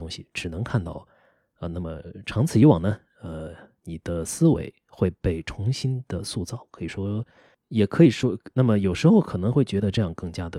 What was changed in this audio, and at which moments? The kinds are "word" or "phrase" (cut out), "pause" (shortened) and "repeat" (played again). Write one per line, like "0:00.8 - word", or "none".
none